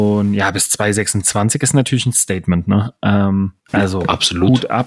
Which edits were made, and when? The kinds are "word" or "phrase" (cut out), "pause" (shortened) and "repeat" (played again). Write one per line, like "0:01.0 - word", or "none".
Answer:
0:03.6 - pause